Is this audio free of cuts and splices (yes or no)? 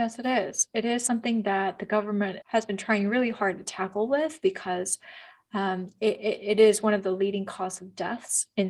yes